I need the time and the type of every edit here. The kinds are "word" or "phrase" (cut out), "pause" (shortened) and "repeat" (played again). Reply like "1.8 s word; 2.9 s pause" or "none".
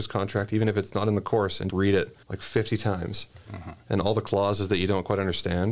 1.7 s word; 2.2 s pause